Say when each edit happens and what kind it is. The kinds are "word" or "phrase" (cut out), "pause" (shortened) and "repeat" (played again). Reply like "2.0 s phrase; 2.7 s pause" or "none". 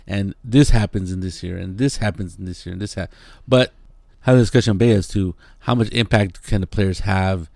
none